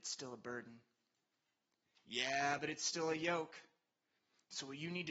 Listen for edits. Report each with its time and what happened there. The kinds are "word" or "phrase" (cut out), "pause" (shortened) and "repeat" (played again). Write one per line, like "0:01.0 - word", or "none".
none